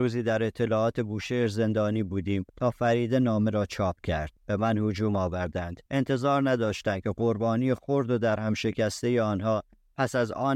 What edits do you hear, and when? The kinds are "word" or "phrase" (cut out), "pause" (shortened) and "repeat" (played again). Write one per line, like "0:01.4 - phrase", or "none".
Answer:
0:02.5 - pause
0:04.4 - pause
0:05.9 - pause